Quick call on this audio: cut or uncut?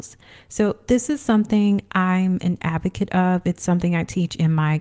uncut